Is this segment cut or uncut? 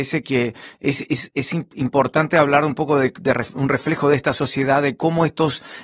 uncut